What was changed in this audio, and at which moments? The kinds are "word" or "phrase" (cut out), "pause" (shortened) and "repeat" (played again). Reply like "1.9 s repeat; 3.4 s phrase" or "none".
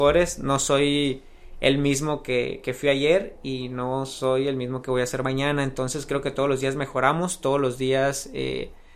none